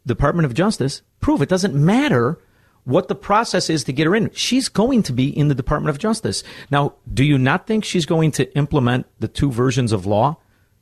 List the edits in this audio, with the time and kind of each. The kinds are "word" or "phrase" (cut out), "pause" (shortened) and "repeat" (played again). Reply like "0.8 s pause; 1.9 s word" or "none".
1.1 s pause